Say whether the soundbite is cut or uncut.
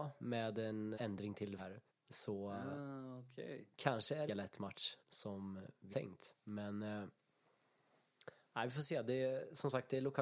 cut